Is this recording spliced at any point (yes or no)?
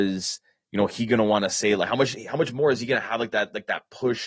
no